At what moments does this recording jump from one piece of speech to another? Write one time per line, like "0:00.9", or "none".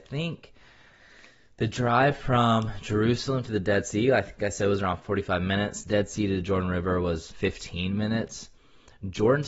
0:07.3

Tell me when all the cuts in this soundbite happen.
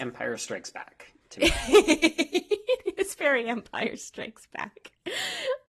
none

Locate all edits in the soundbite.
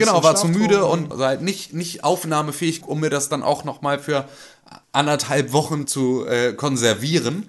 0:01.1
0:02.8
0:04.8
0:05.8

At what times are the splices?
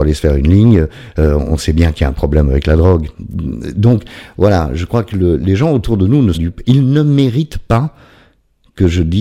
0:06.3

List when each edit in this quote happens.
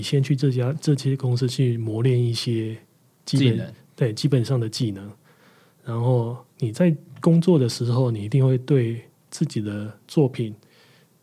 none

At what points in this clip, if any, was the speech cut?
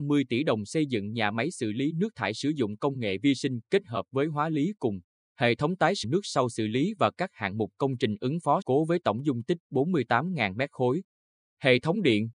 0:06.0
0:08.6

